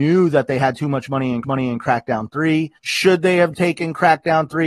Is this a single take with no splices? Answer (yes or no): no